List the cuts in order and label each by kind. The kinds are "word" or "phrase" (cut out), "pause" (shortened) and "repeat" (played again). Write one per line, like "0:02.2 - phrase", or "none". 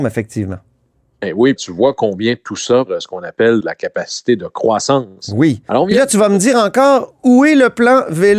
0:01.6 - phrase
0:02.9 - phrase
0:03.6 - word